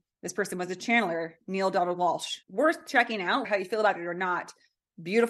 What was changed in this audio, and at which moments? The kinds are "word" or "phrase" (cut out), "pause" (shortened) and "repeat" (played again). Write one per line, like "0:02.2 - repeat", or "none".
0:02.4 - pause
0:03.4 - word